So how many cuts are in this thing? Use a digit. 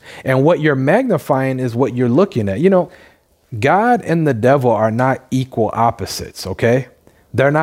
0